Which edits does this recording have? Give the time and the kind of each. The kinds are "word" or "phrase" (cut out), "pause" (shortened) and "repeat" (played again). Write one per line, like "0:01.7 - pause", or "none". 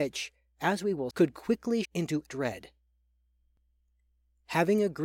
0:01.1 - word
0:01.8 - word
0:02.3 - word